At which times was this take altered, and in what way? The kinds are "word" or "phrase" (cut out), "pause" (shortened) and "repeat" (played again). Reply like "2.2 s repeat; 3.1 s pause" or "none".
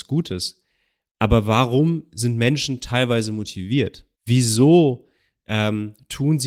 4.2 s pause